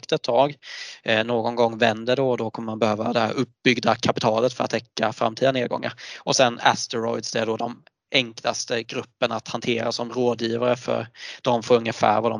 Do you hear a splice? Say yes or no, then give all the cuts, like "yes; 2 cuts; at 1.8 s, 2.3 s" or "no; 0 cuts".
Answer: no; 0 cuts